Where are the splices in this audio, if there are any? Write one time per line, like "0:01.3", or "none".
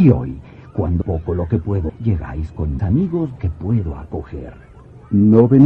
0:01.0
0:01.9
0:02.8
0:03.4